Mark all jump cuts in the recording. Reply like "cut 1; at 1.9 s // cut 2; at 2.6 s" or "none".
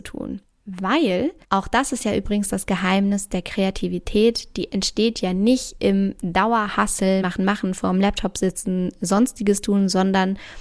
cut 1; at 1.4 s // cut 2; at 7.2 s